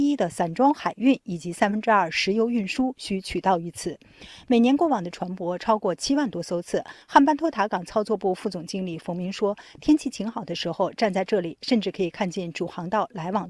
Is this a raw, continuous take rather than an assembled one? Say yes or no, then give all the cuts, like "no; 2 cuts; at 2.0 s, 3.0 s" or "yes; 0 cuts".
no; 1 cut; at 7.0 s